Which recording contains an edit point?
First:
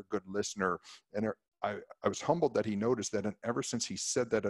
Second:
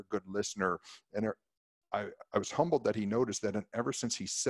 first; 1 cut; at 1.5 s

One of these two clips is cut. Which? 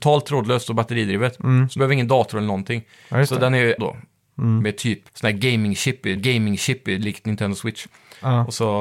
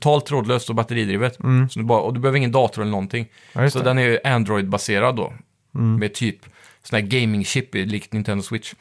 first; 4 cuts; at 1.8 s, 3.8 s, 5.1 s, 6.2 s

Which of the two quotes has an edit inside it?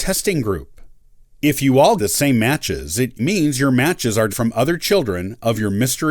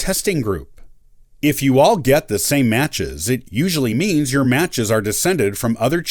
first; 3 cuts; at 2.0 s, 3.2 s, 4.3 s

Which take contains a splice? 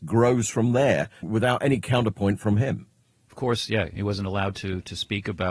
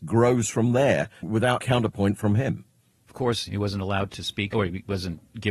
second; 4 cuts; at 1.6 s, 3.5 s, 4.1 s, 4.5 s

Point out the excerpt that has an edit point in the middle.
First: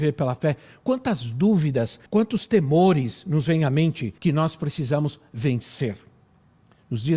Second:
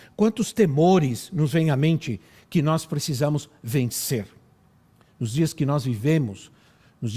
first; 2 cuts; at 2.1 s, 4.2 s

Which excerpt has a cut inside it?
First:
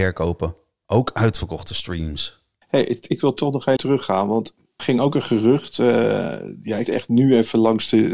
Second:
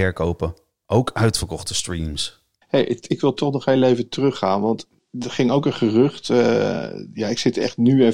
first; 3 cuts; at 3.8 s, 4.8 s, 6.8 s

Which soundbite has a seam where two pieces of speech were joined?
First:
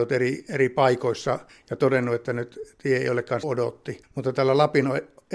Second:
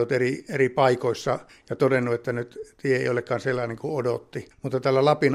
first; 1 cut; at 3.4 s

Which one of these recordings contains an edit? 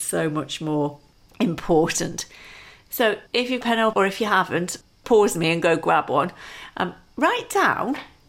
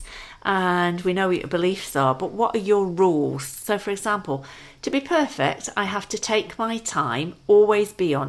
first; 3 cuts; at 3.3 s, 3.6 s, 3.9 s

